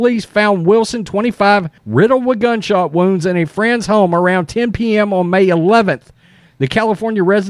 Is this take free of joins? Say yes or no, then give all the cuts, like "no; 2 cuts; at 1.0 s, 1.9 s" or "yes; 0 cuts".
no; 1 cut; at 1.8 s